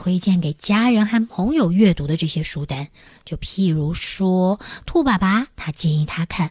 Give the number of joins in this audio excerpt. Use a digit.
0